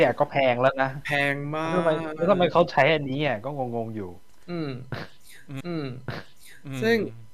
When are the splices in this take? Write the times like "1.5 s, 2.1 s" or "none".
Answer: 5.6 s